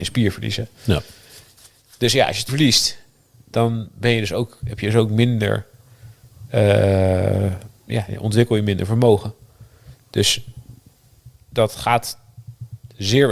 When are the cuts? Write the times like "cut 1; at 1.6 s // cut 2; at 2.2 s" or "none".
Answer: cut 1; at 2.5 s